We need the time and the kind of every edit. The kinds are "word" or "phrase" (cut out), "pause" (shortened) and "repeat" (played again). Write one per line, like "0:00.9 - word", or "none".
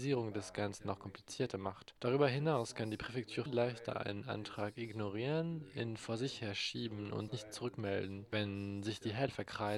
0:03.5 - word
0:07.3 - word